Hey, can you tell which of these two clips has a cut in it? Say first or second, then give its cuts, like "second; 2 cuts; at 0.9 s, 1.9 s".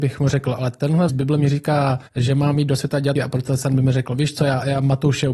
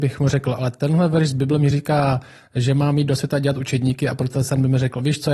first; 3 cuts; at 1.1 s, 2.1 s, 3.1 s